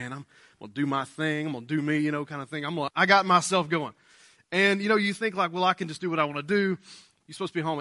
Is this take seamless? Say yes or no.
yes